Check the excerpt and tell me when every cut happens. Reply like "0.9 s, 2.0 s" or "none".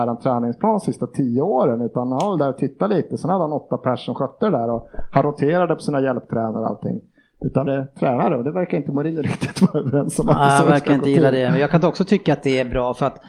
7.7 s